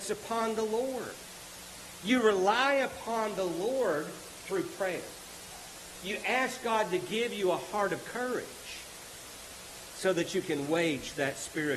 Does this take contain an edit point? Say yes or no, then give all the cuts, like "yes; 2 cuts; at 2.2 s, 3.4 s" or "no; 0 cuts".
no; 0 cuts